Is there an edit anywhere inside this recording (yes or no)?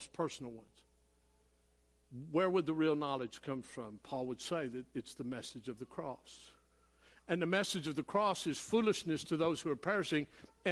no